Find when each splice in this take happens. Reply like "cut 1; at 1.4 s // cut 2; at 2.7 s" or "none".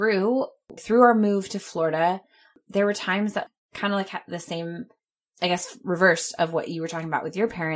none